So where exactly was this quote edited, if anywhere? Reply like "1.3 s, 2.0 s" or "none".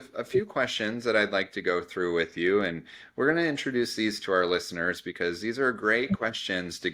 none